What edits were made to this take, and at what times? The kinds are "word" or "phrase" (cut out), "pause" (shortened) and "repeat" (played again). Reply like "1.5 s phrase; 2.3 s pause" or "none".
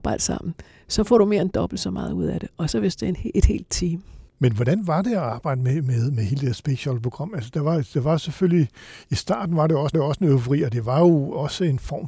9.9 s repeat